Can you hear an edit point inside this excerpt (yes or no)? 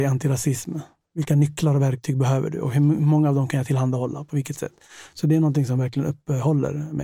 no